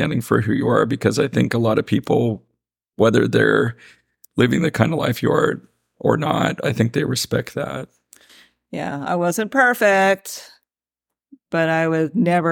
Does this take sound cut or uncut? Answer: uncut